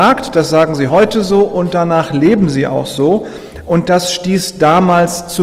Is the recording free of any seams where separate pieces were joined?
yes; 0 cuts

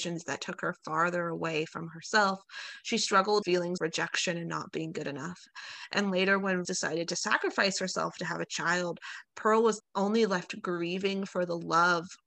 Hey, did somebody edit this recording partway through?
yes; 4 cuts; at 3.4 s, 3.8 s, 6.6 s, 9.8 s

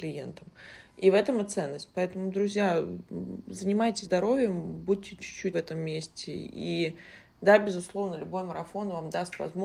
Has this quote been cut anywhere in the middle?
yes; 2 cuts; at 4.0 s, 5.5 s

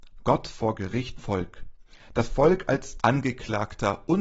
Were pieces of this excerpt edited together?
yes; 2 cuts; at 1.2 s, 3.0 s

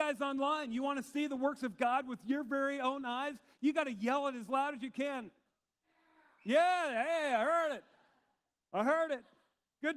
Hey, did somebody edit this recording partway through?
no; 0 cuts

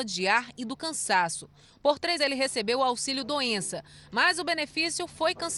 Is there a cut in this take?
yes; 1 cut; at 2.2 s

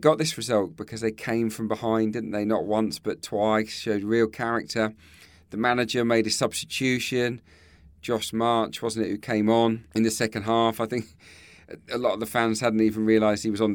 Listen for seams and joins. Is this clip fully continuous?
yes; 0 cuts

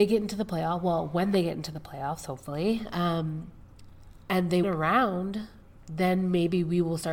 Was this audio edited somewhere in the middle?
yes; 1 cut; at 4.6 s

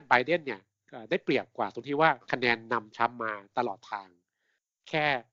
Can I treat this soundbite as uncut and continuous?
yes; 0 cuts

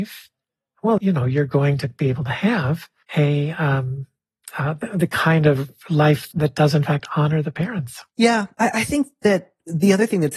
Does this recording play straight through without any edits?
no; 4 cuts; at 1.0 s, 3.0 s, 6.3 s, 8.1 s

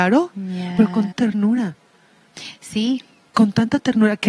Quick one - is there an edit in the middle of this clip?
yes; 1 cut; at 1.1 s

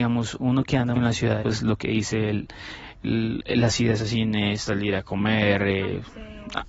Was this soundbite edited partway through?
yes; 2 cuts; at 0.9 s, 1.4 s

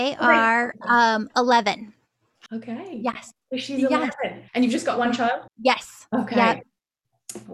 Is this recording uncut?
no; 3 cuts; at 2.5 s, 4.5 s, 5.5 s

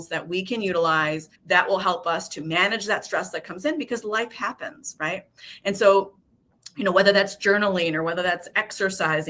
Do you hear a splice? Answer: yes; 1 cut; at 1.4 s

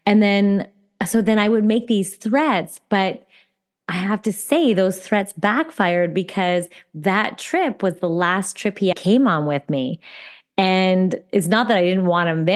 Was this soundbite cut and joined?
yes; 1 cut; at 8.9 s

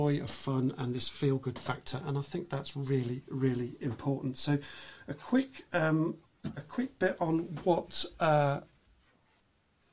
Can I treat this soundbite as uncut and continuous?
no; 1 cut; at 6.3 s

